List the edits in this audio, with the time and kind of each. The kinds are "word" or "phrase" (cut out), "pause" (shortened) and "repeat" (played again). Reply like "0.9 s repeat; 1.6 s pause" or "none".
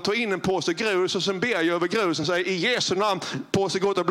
none